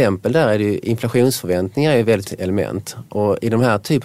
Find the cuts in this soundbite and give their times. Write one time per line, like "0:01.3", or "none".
0:02.3

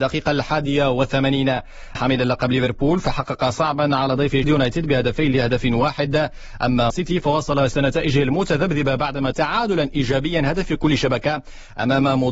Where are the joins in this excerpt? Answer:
0:02.0
0:03.5
0:04.4
0:06.9
0:07.7
0:09.3

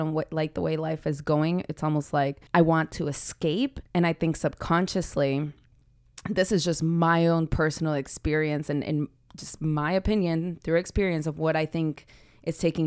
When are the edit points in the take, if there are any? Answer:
0:02.5
0:03.9

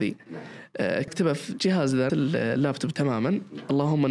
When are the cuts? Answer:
0:01.1
0:02.1

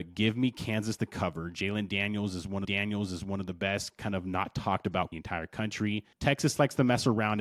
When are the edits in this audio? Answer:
0:02.6
0:05.1
0:06.1

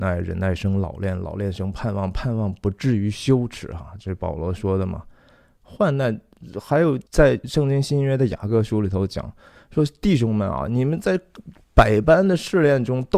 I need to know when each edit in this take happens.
0:07.1

